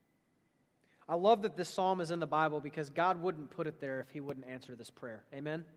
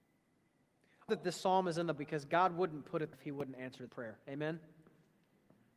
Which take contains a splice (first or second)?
second